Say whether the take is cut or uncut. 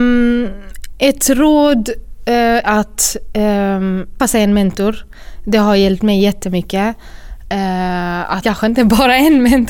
cut